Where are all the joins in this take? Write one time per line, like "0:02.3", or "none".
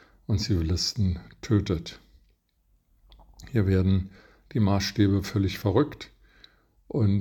none

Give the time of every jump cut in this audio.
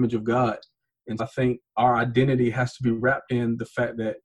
0:01.2

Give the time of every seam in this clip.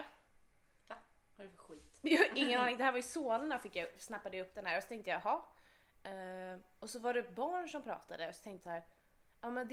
0:08.6

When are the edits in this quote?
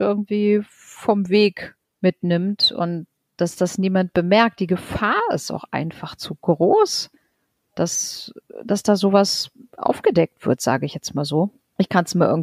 none

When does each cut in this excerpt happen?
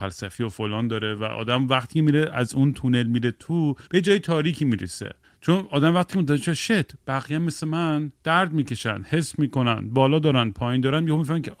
0:03.9
0:05.2
0:08.2

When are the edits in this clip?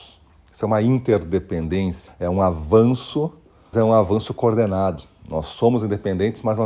0:02.1
0:03.7

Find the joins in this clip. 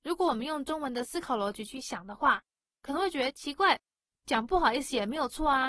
none

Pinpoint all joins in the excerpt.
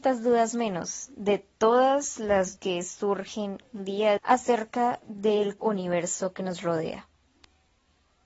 0:02.6
0:04.2
0:05.6

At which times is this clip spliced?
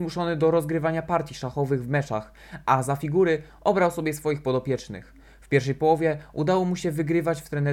none

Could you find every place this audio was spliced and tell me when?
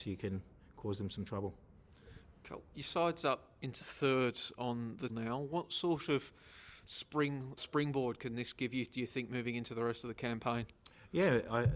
0:05.1
0:07.6

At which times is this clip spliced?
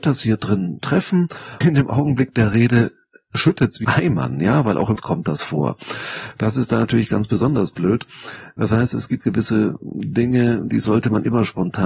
0:01.6
0:03.8
0:05.0
0:09.2

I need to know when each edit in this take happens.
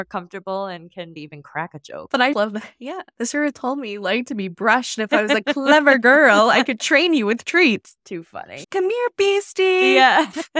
0:02.3
0:08.6

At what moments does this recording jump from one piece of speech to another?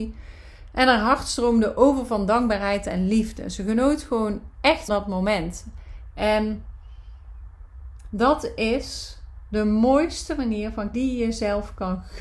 0:04.9
0:10.9

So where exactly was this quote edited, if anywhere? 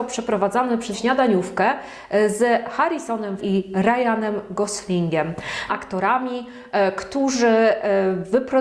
0:00.9
0:03.4
0:05.7

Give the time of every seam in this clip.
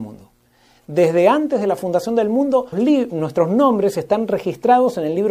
0:02.7

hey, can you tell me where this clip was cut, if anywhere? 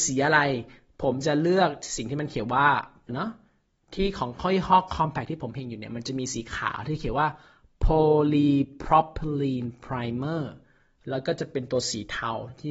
0:03.1

